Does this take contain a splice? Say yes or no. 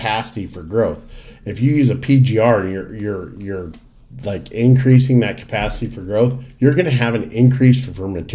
no